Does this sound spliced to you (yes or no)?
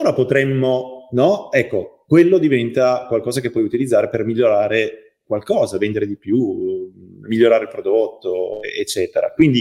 no